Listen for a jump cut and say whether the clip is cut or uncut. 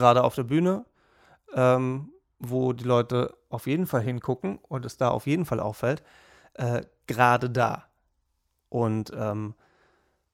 uncut